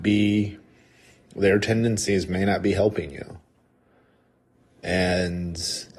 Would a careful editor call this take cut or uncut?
uncut